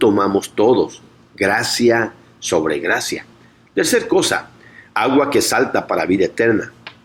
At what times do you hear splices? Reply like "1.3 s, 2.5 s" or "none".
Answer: none